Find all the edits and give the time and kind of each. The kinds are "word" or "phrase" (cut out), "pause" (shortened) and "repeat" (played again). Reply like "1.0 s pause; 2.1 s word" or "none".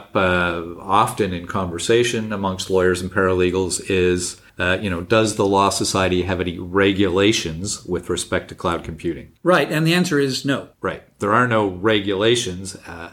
4.5 s pause; 9.4 s pause; 10.7 s pause